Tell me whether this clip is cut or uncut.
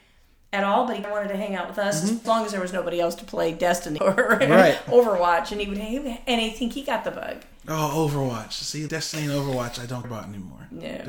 cut